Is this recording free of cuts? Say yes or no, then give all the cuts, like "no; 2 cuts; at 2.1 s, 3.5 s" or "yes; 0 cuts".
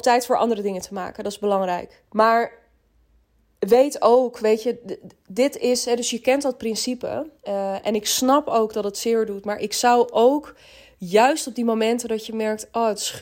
no; 2 cuts; at 2.1 s, 7.4 s